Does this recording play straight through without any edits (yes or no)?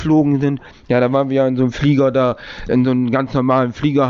yes